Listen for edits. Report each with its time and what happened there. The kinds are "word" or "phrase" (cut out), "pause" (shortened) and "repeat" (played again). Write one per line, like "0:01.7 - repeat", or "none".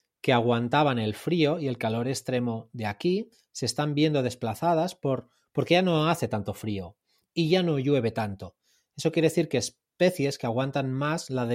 none